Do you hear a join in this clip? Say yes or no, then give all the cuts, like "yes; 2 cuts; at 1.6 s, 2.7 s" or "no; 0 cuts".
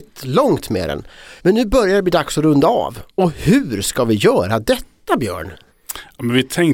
yes; 3 cuts; at 1.4 s, 3.1 s, 5.7 s